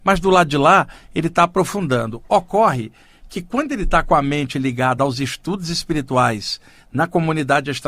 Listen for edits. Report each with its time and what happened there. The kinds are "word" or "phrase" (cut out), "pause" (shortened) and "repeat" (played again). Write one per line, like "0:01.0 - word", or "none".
none